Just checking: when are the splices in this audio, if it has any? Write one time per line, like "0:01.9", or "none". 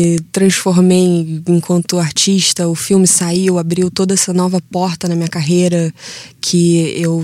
none